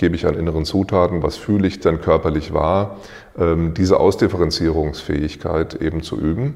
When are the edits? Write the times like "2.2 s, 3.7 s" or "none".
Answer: 1.2 s, 1.8 s